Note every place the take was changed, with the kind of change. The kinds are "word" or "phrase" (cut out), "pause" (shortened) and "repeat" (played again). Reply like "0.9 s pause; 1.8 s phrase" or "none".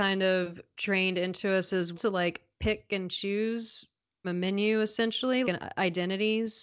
1.9 s word; 4.2 s word; 5.4 s word